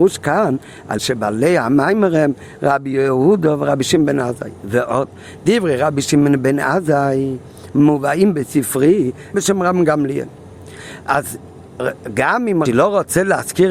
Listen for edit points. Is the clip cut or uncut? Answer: cut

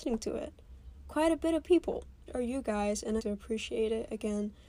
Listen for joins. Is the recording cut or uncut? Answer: cut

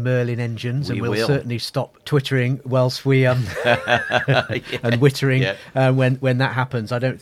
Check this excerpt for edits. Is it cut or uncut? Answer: uncut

